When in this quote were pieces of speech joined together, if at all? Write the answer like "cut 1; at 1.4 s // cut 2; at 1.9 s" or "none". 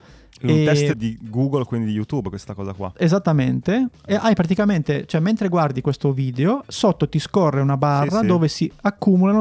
cut 1; at 0.9 s